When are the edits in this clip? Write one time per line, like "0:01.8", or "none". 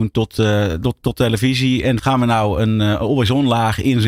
0:02.0